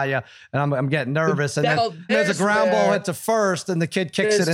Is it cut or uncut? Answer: cut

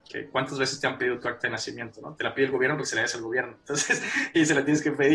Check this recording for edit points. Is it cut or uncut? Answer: uncut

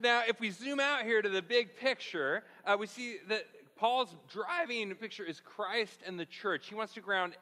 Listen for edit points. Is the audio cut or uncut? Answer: cut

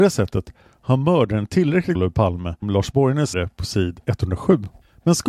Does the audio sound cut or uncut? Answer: cut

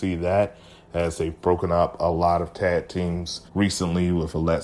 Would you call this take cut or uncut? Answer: cut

